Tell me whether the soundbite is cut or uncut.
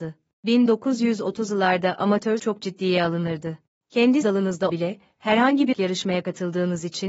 cut